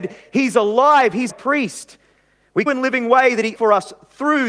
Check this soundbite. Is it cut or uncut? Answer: cut